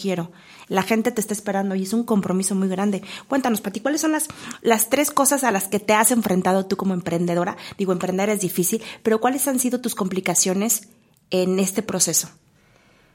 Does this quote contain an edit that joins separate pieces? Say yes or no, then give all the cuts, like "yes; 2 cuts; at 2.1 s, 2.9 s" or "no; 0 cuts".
no; 0 cuts